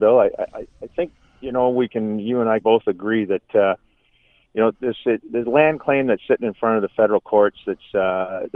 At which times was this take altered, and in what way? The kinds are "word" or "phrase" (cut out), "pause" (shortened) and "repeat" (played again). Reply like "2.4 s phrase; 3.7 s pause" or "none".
2.6 s word; 4.7 s word